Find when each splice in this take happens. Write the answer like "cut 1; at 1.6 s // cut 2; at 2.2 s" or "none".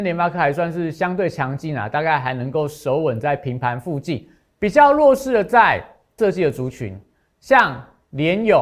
cut 1; at 6.2 s